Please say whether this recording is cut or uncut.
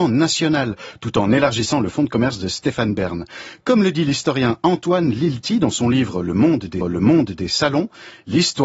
cut